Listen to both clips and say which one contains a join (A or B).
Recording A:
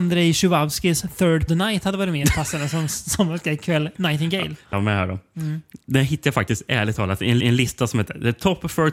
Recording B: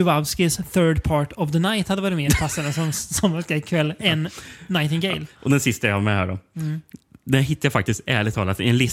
A